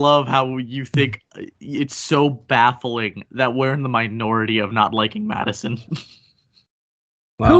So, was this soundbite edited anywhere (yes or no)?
no